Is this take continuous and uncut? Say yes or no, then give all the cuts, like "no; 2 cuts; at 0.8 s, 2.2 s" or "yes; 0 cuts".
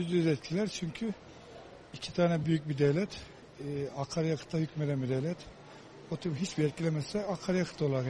yes; 0 cuts